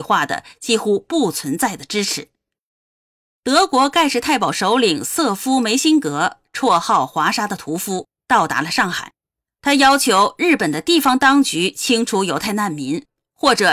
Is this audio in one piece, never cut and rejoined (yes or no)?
yes